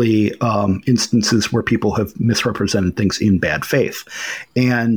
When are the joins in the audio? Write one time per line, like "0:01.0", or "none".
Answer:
none